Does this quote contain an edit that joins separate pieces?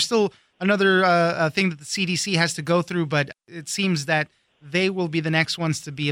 no; 0 cuts

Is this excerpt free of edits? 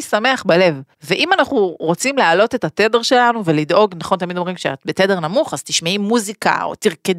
no; 1 cut; at 0.9 s

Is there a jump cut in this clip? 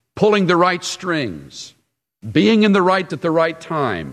yes; 1 cut; at 3.1 s

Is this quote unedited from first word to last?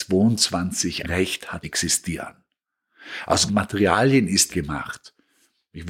no; 4 cuts; at 1.0 s, 1.6 s, 3.5 s, 4.5 s

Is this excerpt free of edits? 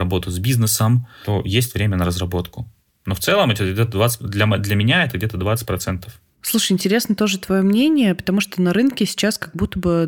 yes; 0 cuts

